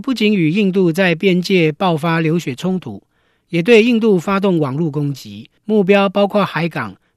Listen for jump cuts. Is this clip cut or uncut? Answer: cut